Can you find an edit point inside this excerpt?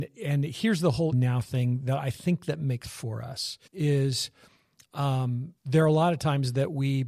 yes; 4 cuts; at 1.1 s, 2.8 s, 3.7 s, 5.6 s

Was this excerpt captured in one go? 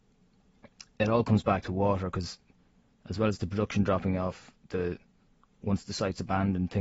yes; 0 cuts

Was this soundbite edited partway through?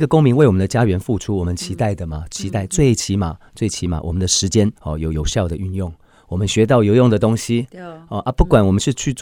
yes; 1 cut; at 4.8 s

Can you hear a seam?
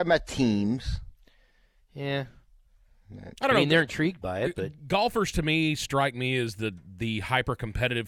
yes; 1 cut; at 3.4 s

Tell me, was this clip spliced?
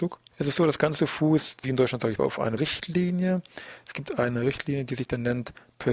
yes; 2 cuts; at 2.2 s, 2.6 s

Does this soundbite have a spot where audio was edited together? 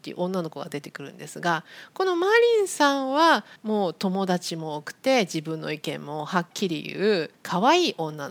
yes; 2 cuts; at 3.6 s, 7.3 s

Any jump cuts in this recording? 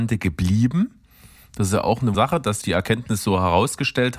yes; 2 cuts; at 2.1 s, 2.6 s

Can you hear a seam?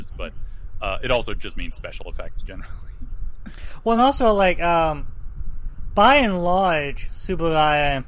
no; 0 cuts

